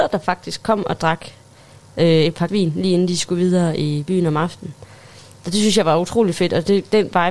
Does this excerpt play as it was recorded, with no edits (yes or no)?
no